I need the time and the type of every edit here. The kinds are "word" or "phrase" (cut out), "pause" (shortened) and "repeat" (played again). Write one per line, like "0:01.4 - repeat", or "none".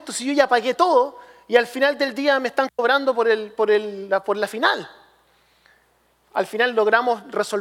none